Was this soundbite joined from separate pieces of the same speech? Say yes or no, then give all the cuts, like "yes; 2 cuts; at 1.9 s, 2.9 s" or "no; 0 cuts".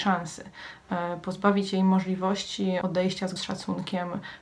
yes; 2 cuts; at 2.8 s, 3.4 s